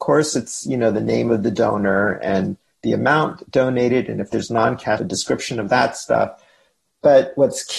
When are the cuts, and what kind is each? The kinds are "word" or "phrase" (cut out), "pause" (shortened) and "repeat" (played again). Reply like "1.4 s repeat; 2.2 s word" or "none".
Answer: 5.0 s word